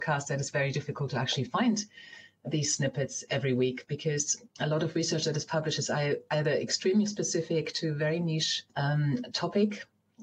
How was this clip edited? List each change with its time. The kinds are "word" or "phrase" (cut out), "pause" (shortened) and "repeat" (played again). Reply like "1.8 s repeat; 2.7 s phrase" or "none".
4.5 s pause; 8.7 s pause

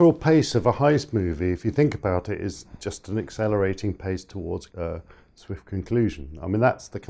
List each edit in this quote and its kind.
none

